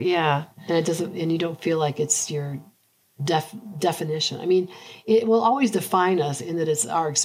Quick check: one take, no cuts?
yes; 0 cuts

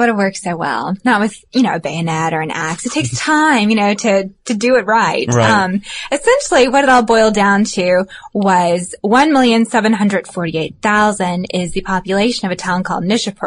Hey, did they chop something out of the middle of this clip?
no; 0 cuts

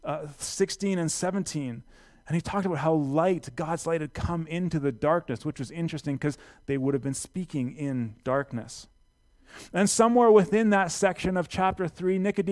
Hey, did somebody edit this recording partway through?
no; 0 cuts

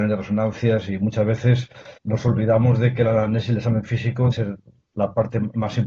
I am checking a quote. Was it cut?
yes; 2 cuts; at 2.0 s, 4.3 s

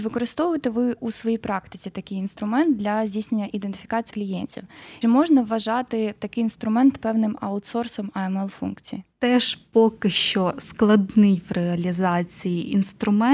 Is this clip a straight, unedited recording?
no; 3 cuts; at 4.1 s, 5.0 s, 9.1 s

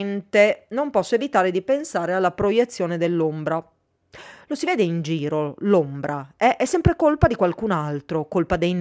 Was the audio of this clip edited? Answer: no; 0 cuts

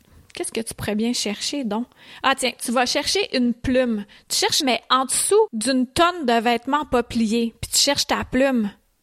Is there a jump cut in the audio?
yes; 1 cut; at 4.6 s

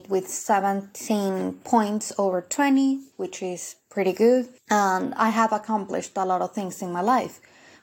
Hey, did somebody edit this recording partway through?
yes; 2 cuts; at 3.1 s, 4.6 s

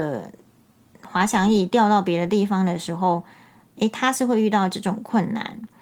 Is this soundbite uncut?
yes; 0 cuts

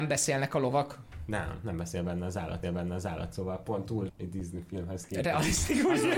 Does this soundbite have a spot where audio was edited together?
yes; 2 cuts; at 2.6 s, 4.1 s

